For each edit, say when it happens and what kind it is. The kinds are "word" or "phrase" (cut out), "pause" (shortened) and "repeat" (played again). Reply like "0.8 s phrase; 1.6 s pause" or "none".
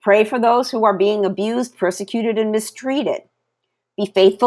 none